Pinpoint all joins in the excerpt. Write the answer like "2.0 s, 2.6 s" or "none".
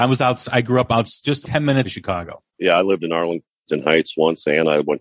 1.4 s, 1.8 s, 2.5 s